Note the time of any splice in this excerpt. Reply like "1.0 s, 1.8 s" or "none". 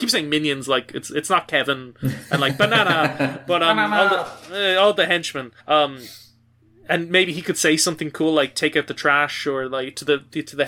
5.6 s